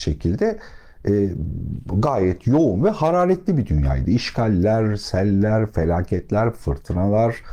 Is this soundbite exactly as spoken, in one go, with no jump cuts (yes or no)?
yes